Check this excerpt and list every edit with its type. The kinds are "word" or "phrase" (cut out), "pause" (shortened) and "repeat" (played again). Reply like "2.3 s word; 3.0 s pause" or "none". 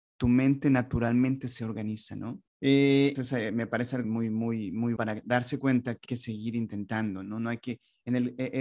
2.5 s pause; 3.2 s phrase; 4.0 s word; 5.0 s word; 6.1 s word